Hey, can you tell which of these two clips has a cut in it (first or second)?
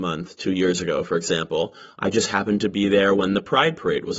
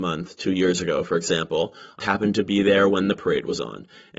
second